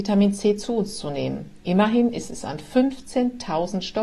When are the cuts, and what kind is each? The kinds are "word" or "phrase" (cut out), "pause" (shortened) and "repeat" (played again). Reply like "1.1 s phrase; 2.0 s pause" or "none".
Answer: none